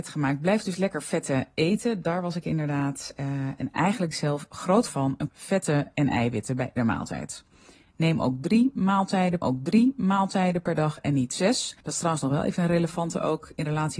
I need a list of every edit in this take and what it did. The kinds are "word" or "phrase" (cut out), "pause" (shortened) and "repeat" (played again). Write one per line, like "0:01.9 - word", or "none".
0:04.1 - phrase
0:04.9 - word
0:05.3 - phrase
0:06.8 - word
0:09.4 - repeat
0:11.8 - pause